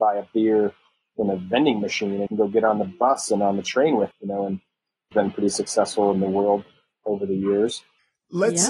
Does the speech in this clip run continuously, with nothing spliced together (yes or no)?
no